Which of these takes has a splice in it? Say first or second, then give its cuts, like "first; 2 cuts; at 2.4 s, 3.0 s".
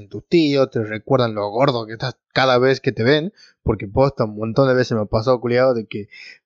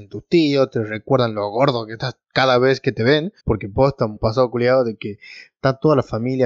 second; 2 cuts; at 3.4 s, 4.2 s